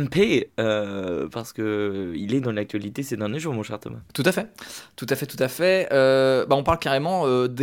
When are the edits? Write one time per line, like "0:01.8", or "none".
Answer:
0:04.1

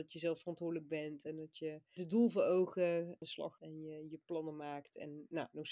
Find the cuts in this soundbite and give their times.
0:02.0
0:03.2
0:03.6

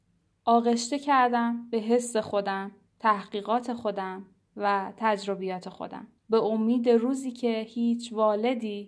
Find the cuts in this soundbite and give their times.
0:06.2

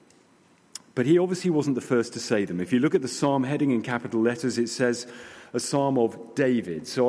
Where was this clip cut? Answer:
none

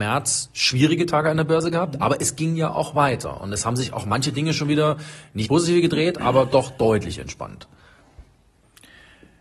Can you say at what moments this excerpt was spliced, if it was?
0:05.4

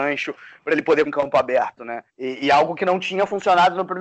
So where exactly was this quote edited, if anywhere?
0:01.1
0:02.1

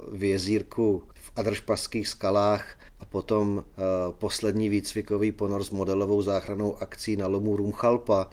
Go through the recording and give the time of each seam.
0:01.1
0:02.9

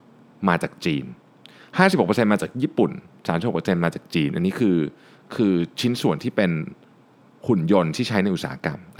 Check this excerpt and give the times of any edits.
none

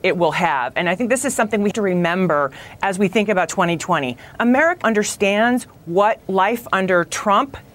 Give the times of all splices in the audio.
0:01.7
0:04.8
0:06.2

